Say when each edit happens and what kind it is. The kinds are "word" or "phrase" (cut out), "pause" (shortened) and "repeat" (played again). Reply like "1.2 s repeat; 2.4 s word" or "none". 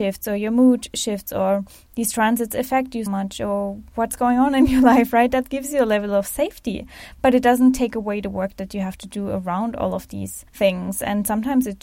3.1 s word; 10.5 s pause